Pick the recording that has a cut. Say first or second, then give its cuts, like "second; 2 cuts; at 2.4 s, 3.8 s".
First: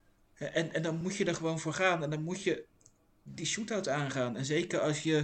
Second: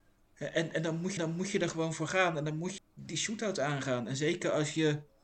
second; 2 cuts; at 1.2 s, 2.8 s